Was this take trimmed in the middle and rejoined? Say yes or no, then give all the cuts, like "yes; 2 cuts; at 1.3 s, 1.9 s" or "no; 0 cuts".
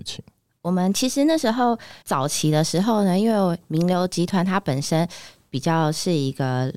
yes; 1 cut; at 2.0 s